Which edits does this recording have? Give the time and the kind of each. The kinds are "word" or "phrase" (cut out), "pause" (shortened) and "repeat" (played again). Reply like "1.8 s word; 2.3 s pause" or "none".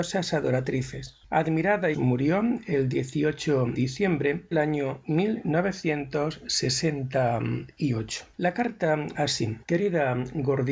1.9 s phrase; 3.8 s word; 4.5 s word; 8.3 s pause; 9.1 s word; 9.6 s pause